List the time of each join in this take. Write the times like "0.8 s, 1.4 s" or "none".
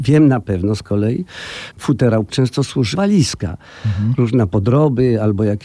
1.7 s, 2.3 s, 2.9 s